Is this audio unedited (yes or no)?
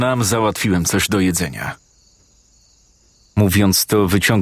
yes